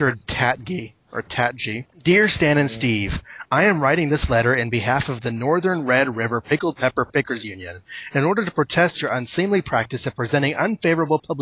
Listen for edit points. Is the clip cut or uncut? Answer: cut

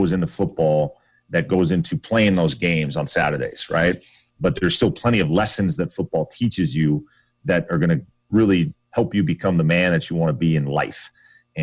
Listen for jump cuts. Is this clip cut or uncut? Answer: uncut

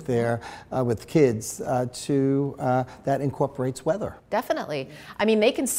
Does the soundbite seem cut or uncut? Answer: uncut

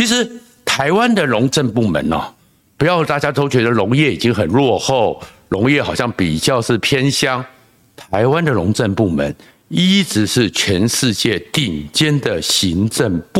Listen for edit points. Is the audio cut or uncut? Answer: uncut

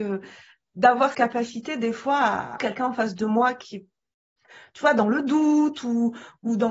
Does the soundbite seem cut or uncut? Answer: cut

